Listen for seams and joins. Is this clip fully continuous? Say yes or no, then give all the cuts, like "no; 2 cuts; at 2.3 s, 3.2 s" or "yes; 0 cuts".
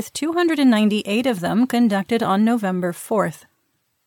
yes; 0 cuts